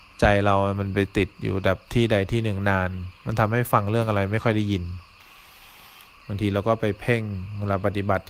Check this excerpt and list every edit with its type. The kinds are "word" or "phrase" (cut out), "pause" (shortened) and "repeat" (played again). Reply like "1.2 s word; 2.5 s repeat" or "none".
none